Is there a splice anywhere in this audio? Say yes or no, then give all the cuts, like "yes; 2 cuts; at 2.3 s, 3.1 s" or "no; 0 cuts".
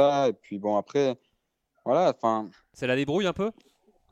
no; 0 cuts